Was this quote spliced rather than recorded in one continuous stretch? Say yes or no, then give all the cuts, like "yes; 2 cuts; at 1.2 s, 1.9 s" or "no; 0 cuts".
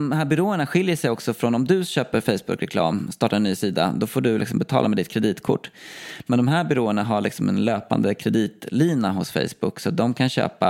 no; 0 cuts